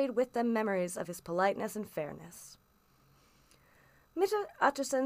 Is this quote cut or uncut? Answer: uncut